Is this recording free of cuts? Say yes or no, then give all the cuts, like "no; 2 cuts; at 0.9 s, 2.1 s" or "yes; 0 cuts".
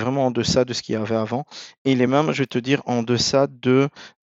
yes; 0 cuts